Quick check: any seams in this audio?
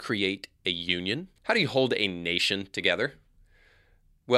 yes; 1 cut; at 1.4 s

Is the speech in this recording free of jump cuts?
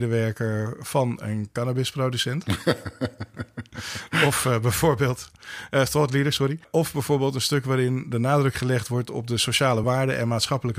yes; 0 cuts

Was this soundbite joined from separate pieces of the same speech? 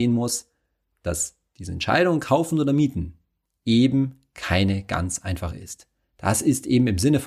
yes; 1 cut; at 5.5 s

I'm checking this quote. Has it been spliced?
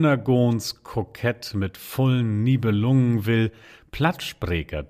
no; 0 cuts

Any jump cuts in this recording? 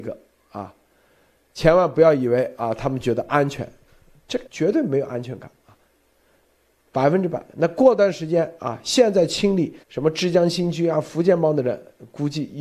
yes; 2 cuts; at 4.5 s, 9.8 s

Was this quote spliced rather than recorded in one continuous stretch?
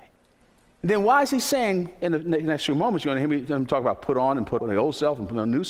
yes; 1 cut; at 4.6 s

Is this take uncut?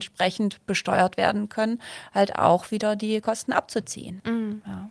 yes; 0 cuts

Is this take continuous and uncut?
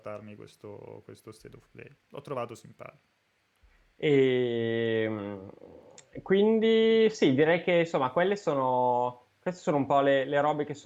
no; 1 cut; at 2.0 s

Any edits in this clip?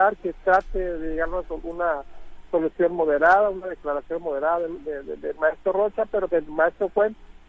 yes; 1 cut; at 6.3 s

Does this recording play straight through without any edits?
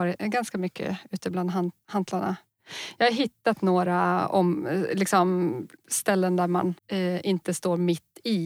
no; 2 cuts; at 5.8 s, 6.8 s

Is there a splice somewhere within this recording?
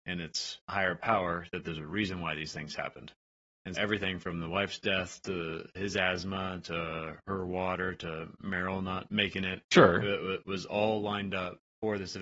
yes; 1 cut; at 3.7 s

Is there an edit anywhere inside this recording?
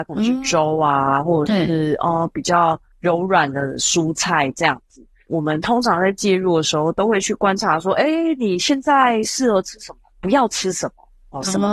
no; 0 cuts

